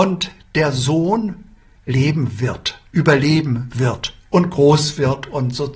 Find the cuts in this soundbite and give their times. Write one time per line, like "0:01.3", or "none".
0:01.7
0:02.9

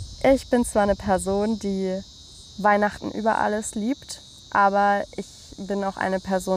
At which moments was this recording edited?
none

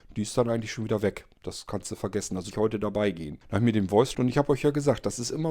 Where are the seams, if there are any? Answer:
0:02.5
0:03.4
0:04.1

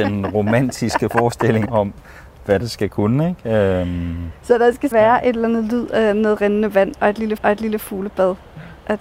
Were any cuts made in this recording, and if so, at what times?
0:01.7
0:02.6
0:04.9
0:07.4

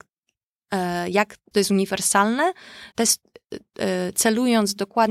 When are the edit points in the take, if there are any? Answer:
0:01.5
0:02.9

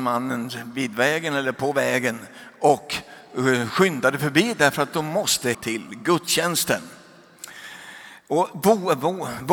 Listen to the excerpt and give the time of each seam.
0:05.5

